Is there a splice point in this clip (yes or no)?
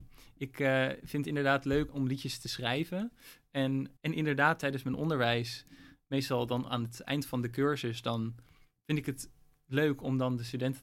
yes